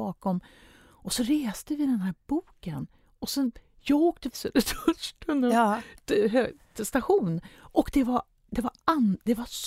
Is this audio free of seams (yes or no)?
no